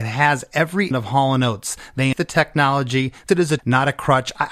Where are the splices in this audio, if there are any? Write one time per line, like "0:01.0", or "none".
0:00.9
0:02.1
0:03.3
0:03.6